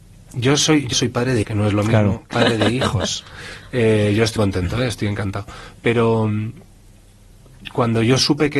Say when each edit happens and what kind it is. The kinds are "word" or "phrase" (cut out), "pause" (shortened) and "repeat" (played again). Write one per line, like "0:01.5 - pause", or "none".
0:00.9 - word
0:01.4 - word
0:02.3 - word
0:04.4 - word